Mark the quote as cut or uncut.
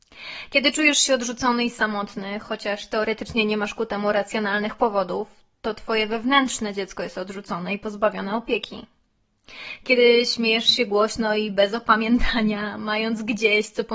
uncut